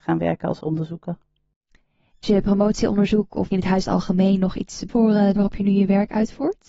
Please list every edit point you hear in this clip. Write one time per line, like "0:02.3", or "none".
0:02.2
0:03.5
0:03.8
0:04.9
0:05.4

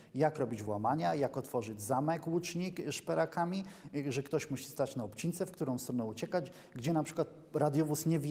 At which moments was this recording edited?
none

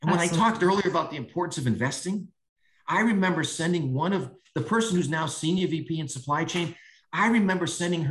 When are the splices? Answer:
none

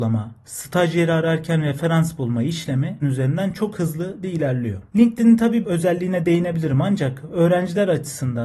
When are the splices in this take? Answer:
0:03.0
0:04.2
0:05.6

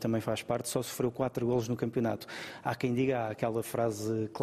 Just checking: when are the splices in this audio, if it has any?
none

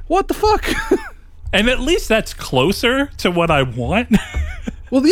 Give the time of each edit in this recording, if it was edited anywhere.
none

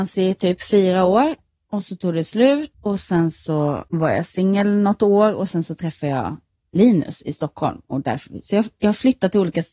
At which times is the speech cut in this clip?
0:02.7
0:03.9

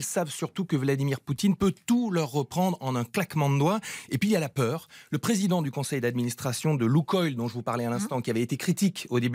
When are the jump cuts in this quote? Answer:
none

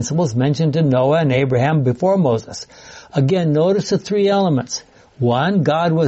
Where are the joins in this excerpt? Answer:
none

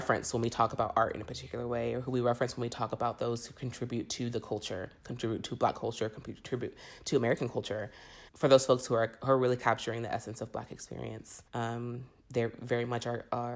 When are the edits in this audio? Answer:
0:08.3
0:11.5

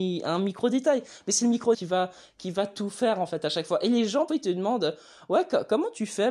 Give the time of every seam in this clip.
0:01.7
0:04.3

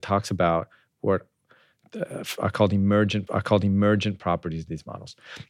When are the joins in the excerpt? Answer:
0:03.3

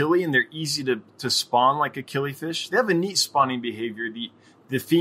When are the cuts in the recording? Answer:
none

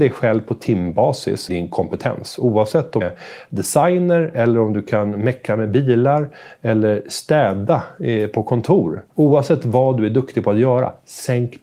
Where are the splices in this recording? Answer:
0:01.5
0:03.0
0:09.1

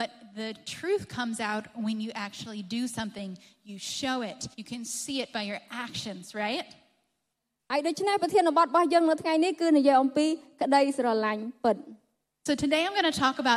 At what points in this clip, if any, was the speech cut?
0:04.5

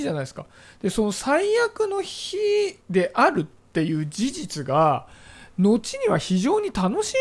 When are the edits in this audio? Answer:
0:02.8

